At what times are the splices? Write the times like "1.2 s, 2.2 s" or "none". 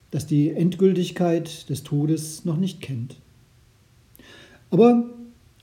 none